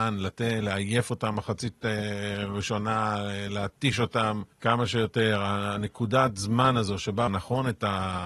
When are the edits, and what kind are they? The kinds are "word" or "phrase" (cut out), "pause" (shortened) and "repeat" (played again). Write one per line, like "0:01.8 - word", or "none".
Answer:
0:04.5 - pause
0:07.3 - phrase

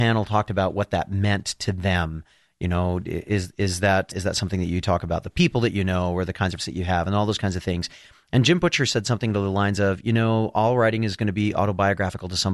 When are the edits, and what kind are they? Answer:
0:04.1 - word
0:06.6 - word

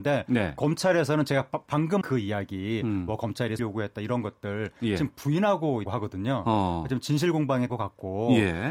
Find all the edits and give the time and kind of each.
0:02.0 - word
0:03.6 - word
0:05.9 - word
0:07.7 - word

